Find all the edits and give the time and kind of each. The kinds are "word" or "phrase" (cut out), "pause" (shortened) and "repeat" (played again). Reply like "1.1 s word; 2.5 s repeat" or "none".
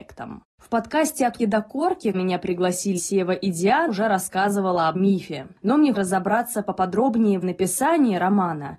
1.4 s word; 2.1 s word; 3.0 s word; 3.9 s word; 4.9 s word; 5.9 s word; 7.4 s word